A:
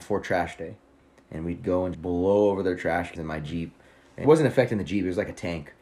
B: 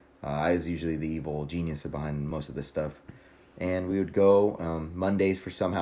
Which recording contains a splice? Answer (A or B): A